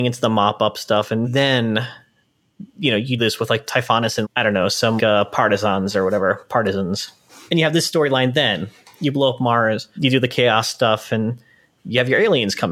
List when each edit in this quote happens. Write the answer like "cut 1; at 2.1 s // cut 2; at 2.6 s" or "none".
cut 1; at 1.2 s // cut 2; at 3.2 s // cut 3; at 4.2 s // cut 4; at 5.0 s // cut 5; at 10.0 s